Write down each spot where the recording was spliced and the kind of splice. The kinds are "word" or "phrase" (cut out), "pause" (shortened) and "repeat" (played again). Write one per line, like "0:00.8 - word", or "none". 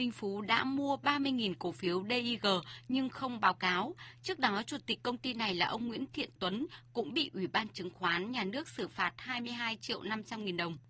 none